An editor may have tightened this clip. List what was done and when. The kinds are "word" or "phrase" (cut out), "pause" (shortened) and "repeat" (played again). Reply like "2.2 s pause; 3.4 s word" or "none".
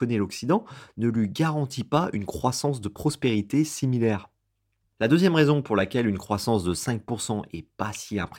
none